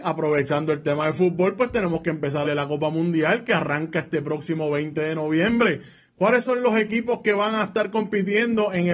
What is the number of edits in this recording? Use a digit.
1